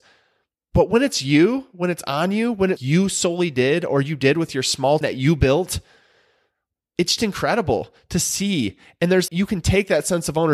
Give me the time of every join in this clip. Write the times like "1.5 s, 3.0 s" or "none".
2.8 s, 5.0 s, 7.2 s, 9.3 s